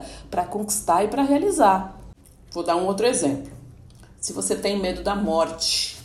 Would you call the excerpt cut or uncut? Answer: uncut